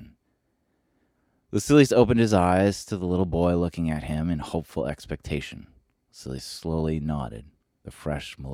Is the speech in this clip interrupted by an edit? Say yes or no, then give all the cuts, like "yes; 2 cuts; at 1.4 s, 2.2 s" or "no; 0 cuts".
no; 0 cuts